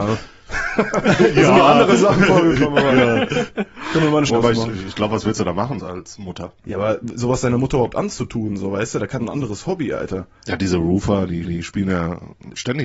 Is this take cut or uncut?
cut